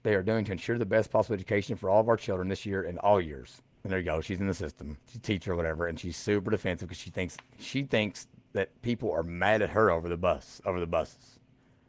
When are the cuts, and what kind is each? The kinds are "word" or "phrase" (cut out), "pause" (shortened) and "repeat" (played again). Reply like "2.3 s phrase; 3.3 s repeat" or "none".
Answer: 3.7 s pause; 5.0 s pause; 8.7 s pause